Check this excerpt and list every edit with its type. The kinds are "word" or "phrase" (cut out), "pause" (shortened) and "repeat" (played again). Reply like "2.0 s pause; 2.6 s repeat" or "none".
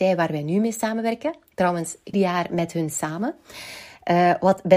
2.1 s phrase